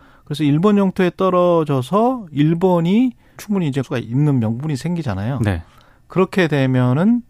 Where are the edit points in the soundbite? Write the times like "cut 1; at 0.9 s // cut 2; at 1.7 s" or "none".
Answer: cut 1; at 3.4 s // cut 2; at 3.8 s